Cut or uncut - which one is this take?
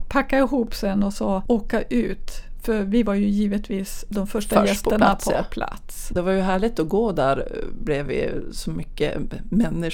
uncut